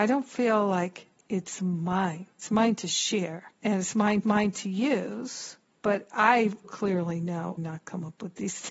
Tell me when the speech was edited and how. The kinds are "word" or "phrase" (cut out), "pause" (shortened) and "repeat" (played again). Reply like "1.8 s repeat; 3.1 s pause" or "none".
1.2 s pause; 2.3 s pause; 3.5 s pause; 4.2 s repeat; 5.7 s pause; 6.6 s word; 7.6 s phrase